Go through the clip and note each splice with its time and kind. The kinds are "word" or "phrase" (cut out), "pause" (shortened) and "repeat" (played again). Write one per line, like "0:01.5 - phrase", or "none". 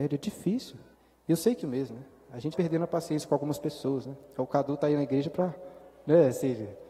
0:00.9 - pause
0:01.6 - phrase
0:02.5 - word